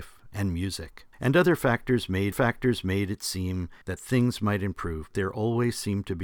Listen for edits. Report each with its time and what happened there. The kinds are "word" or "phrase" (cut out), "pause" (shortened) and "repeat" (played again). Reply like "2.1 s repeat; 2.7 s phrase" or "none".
1.1 s pause; 2.3 s repeat; 3.8 s pause; 5.1 s word